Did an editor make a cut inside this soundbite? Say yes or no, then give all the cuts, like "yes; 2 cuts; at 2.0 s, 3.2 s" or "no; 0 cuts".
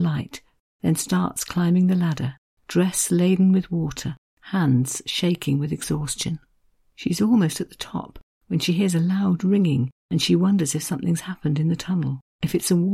no; 0 cuts